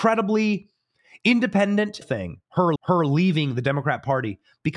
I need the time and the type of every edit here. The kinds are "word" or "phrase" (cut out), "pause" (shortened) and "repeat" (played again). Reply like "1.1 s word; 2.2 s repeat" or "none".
2.0 s phrase; 2.8 s repeat